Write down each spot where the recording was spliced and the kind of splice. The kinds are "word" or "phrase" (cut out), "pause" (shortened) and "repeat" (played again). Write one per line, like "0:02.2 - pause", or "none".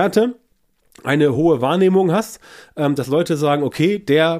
none